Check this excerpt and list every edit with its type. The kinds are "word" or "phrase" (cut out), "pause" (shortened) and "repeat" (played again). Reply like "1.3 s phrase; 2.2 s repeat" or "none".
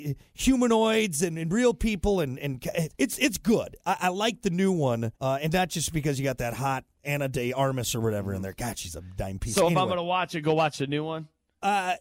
2.9 s pause; 5.1 s pause; 6.9 s pause